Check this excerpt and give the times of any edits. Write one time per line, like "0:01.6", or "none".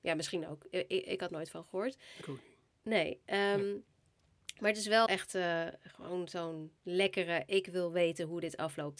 0:01.3
0:02.2
0:02.7
0:05.1
0:06.8